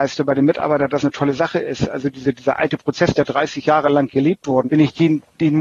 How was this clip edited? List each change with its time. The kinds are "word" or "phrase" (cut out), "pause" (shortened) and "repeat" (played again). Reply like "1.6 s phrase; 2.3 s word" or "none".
1.0 s word; 4.7 s word